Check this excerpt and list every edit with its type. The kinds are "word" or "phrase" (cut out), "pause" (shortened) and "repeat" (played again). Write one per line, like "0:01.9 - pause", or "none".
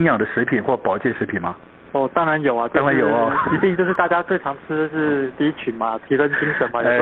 none